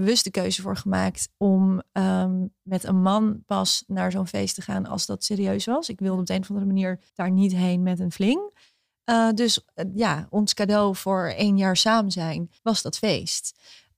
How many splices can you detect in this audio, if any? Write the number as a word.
two